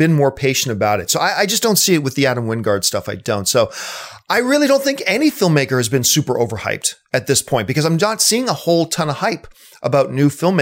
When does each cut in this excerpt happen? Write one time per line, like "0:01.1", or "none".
none